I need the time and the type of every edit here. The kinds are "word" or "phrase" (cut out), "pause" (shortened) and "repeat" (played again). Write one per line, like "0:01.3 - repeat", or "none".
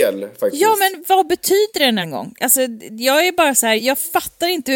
0:02.0 - word
0:03.8 - word